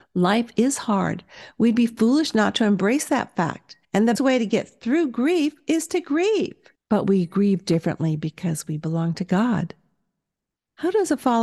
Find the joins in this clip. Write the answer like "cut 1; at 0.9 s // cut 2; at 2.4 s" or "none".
cut 1; at 3.8 s // cut 2; at 4.1 s // cut 3; at 6.7 s